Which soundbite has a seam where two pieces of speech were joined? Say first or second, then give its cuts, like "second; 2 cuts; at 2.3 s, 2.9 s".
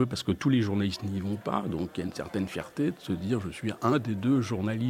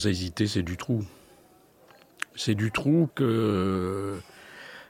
second; 1 cut; at 3.1 s